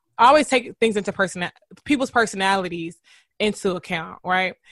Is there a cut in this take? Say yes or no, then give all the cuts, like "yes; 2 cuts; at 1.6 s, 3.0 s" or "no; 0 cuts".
no; 0 cuts